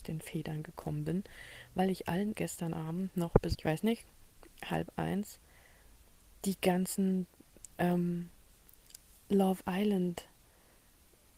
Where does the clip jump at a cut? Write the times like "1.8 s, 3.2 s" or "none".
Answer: 2.3 s, 3.5 s, 4.9 s